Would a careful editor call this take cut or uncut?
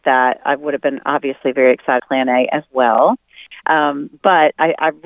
cut